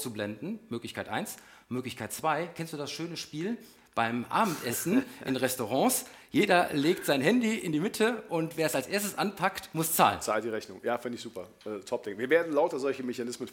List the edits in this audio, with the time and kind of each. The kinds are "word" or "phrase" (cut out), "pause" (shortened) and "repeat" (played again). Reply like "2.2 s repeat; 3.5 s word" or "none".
none